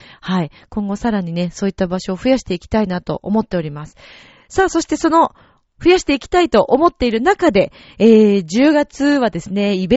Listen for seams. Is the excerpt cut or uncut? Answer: uncut